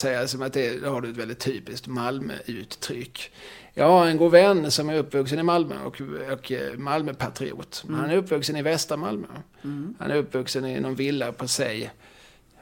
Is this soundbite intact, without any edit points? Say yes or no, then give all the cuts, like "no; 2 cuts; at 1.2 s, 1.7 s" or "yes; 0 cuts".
yes; 0 cuts